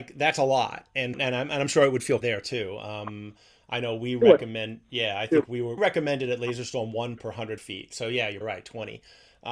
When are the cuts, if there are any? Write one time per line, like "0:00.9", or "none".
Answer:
0:01.1
0:02.2
0:05.8
0:07.2
0:07.6
0:08.4